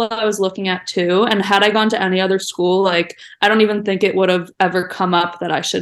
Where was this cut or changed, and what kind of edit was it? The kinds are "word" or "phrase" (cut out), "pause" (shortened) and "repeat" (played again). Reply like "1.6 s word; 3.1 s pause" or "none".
none